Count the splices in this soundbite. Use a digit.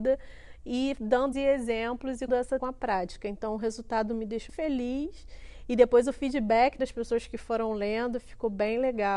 5